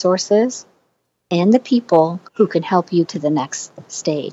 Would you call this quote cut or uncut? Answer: cut